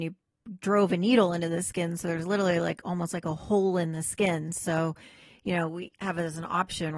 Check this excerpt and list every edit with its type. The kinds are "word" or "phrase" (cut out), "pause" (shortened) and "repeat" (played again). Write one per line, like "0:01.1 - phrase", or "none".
none